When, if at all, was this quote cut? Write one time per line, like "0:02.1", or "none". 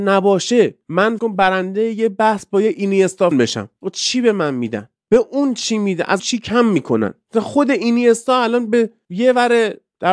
0:01.2
0:03.3
0:06.2